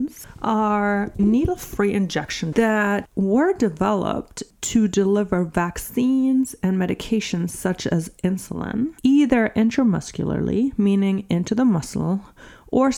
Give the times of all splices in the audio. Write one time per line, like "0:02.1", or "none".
0:01.2
0:02.5
0:09.0